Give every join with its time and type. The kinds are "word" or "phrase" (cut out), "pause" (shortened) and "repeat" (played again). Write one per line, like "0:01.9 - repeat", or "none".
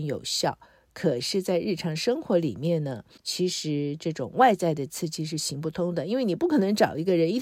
0:03.2 - pause